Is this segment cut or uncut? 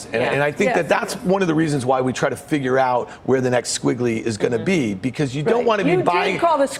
uncut